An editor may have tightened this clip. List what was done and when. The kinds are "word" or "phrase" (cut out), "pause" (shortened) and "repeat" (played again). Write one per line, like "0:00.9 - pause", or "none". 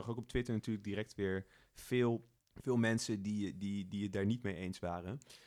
0:02.4 - pause